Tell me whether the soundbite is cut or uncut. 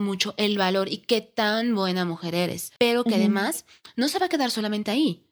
cut